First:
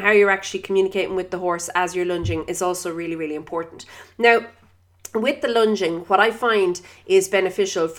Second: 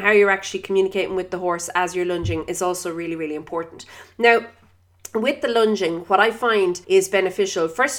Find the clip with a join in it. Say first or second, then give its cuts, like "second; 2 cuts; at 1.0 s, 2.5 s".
second; 1 cut; at 6.8 s